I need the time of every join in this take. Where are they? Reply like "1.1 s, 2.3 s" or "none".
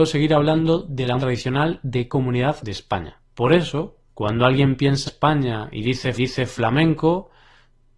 1.2 s, 2.1 s, 2.6 s, 3.3 s, 4.1 s, 5.1 s, 6.2 s